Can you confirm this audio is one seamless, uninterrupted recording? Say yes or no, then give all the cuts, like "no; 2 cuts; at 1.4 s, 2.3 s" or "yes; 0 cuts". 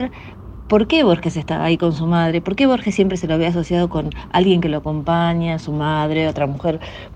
yes; 0 cuts